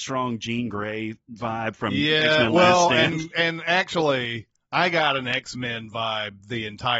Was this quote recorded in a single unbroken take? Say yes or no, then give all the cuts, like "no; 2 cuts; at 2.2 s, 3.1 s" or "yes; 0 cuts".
no; 1 cut; at 1.2 s